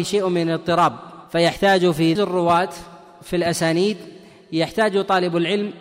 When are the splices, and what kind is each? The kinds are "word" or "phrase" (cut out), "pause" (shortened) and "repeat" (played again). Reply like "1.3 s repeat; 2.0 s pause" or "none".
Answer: 1.3 s pause; 2.2 s phrase